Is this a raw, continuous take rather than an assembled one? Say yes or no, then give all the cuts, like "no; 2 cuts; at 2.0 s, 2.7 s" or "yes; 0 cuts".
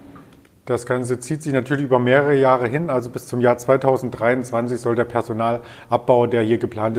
yes; 0 cuts